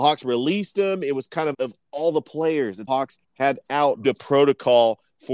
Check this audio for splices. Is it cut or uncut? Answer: cut